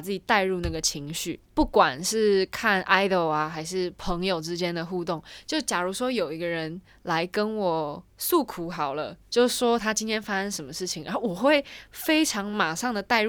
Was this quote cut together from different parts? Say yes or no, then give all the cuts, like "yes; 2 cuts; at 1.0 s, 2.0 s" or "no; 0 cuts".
yes; 3 cuts; at 1.5 s, 8.1 s, 9.3 s